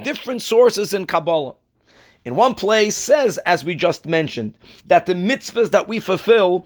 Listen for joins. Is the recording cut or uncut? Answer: cut